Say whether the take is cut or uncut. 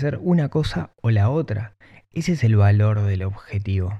uncut